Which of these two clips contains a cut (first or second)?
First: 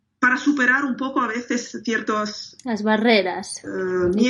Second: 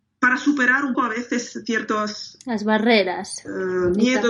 second